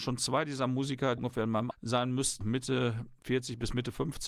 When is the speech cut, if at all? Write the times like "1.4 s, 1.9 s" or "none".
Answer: 1.2 s, 1.7 s, 2.4 s